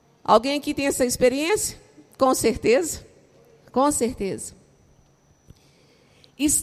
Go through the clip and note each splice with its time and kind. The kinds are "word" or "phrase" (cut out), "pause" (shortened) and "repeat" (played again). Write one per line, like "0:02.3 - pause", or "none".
none